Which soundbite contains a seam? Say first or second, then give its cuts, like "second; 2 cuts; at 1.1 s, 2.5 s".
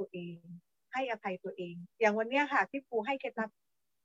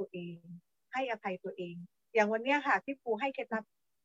first; 1 cut; at 1.9 s